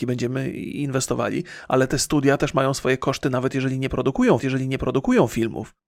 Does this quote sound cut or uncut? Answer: cut